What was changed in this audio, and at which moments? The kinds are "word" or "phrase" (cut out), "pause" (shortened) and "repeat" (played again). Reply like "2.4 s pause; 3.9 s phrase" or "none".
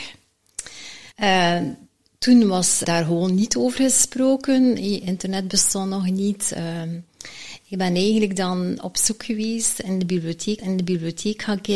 1.1 s pause; 2.8 s word; 10.6 s repeat